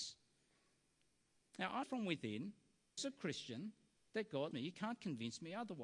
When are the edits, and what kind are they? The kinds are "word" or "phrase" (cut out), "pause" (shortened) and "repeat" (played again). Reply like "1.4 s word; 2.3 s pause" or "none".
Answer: 1.8 s word; 3.0 s word; 4.0 s pause; 4.5 s word